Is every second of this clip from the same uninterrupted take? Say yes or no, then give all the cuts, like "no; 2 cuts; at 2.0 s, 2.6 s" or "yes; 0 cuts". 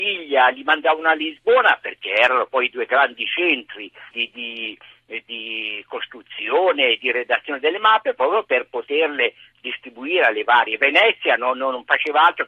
no; 1 cut; at 4.1 s